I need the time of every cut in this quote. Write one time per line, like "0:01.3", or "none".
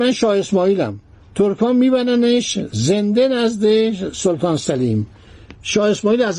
0:01.1